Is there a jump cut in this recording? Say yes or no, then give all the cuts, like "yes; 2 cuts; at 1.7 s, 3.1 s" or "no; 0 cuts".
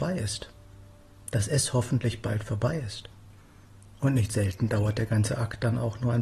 no; 0 cuts